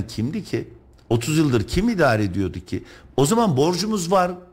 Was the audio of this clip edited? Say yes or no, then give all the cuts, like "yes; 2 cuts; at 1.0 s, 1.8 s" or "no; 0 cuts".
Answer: no; 0 cuts